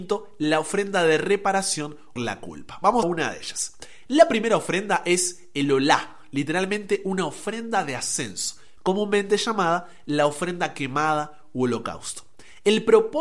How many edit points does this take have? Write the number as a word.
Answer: two